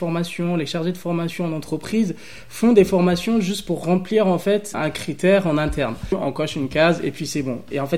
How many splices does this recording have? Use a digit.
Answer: 1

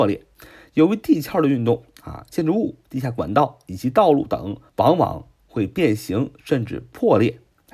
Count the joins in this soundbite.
1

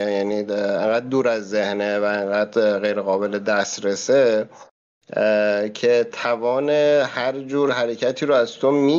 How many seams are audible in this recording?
0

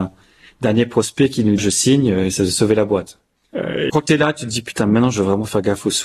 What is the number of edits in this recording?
3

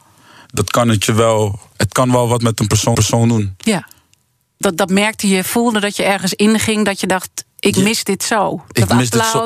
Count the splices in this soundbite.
4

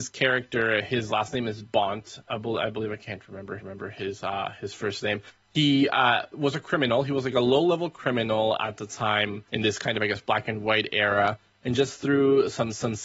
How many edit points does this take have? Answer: 2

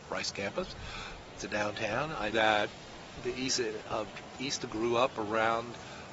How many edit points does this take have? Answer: 4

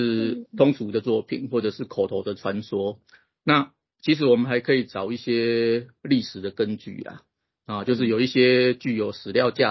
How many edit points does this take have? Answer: 0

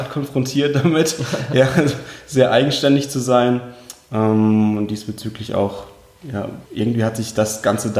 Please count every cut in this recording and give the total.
1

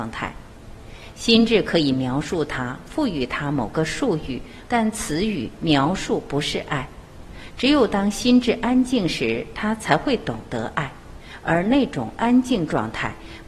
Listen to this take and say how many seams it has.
1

